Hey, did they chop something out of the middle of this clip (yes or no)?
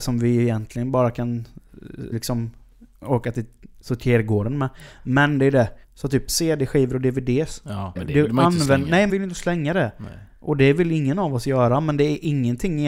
yes